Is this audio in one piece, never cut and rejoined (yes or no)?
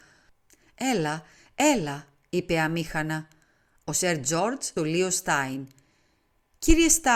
no